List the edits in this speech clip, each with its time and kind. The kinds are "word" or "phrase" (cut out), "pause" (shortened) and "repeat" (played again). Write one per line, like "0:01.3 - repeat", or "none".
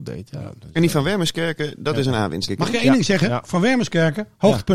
0:02.5 - word